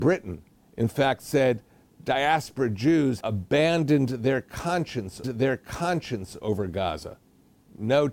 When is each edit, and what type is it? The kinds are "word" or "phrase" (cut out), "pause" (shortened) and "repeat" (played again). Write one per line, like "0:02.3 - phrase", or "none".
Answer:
0:03.2 - word
0:05.2 - repeat